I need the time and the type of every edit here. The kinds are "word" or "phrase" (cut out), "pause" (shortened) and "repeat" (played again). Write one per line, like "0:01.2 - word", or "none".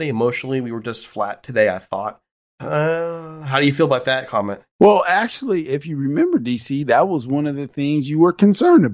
0:02.3 - pause
0:04.7 - pause